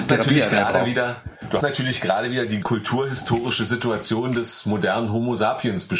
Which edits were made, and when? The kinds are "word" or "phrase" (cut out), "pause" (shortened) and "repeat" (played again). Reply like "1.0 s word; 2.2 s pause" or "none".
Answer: 1.6 s word; 2.6 s word